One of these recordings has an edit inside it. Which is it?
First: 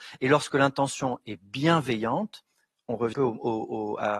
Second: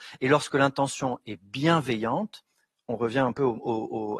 first; 1 cut; at 3.1 s

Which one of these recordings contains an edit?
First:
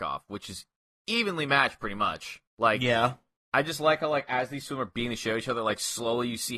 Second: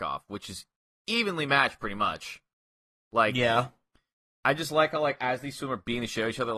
first; 2 cuts; at 2.5 s, 3.4 s

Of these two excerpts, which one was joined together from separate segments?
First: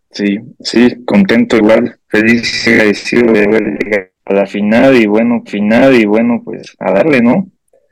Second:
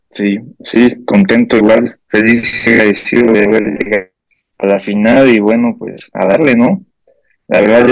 first; 2 cuts; at 4.2 s, 5.5 s

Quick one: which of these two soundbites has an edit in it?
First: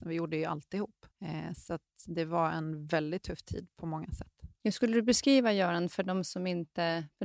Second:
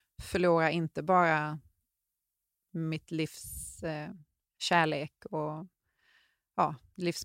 first; 2 cuts; at 1.1 s, 4.5 s

